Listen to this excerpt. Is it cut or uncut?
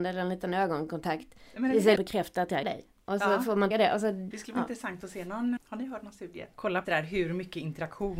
cut